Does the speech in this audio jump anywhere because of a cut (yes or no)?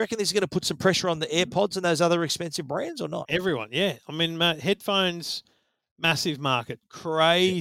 no